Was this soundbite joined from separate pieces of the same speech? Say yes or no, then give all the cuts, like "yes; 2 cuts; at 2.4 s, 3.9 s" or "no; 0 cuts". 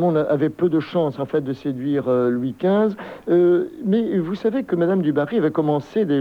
no; 0 cuts